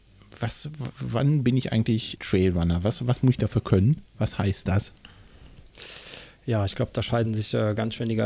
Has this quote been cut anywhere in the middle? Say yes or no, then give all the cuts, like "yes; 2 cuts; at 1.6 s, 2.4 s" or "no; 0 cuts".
yes; 1 cut; at 2.2 s